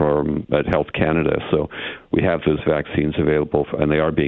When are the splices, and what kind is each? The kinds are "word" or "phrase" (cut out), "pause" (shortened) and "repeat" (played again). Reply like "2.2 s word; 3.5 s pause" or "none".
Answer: none